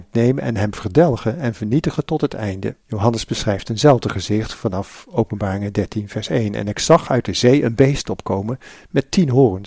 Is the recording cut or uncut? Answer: cut